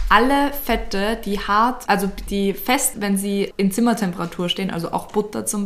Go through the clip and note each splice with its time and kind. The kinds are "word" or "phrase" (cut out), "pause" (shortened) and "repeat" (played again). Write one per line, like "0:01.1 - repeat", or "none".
0:01.9 - word
0:02.3 - word
0:02.9 - word
0:03.5 - word